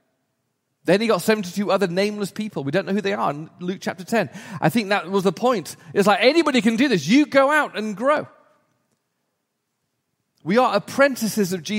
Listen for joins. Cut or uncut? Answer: uncut